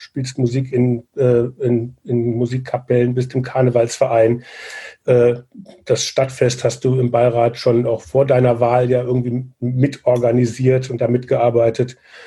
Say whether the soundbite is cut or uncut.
uncut